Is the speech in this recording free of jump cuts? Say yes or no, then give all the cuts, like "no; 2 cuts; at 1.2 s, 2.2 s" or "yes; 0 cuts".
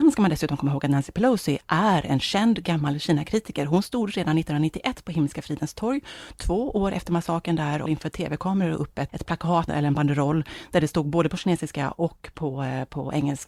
no; 3 cuts; at 7.9 s, 9.1 s, 9.7 s